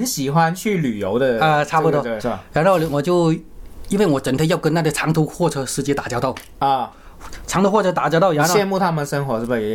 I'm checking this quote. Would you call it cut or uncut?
cut